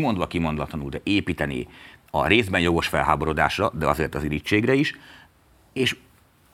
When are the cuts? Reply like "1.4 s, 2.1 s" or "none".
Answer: none